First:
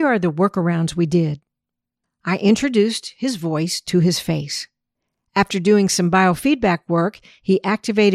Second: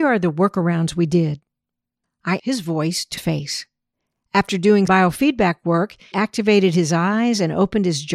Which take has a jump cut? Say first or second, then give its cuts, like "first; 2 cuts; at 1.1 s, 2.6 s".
second; 4 cuts; at 2.4 s, 3.2 s, 4.9 s, 6.1 s